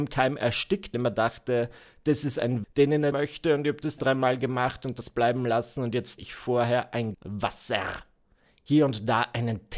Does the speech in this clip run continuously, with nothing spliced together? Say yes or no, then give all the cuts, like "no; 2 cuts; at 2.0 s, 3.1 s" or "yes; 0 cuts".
no; 7 cuts; at 0.9 s, 2.6 s, 3.1 s, 4.0 s, 5.0 s, 6.2 s, 7.1 s